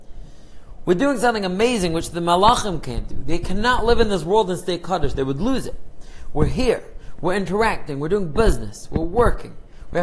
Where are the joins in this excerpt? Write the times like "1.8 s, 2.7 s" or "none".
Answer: none